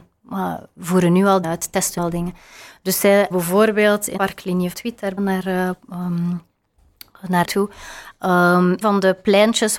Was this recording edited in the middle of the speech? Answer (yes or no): yes